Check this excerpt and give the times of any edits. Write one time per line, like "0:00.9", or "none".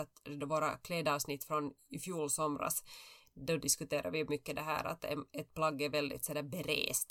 none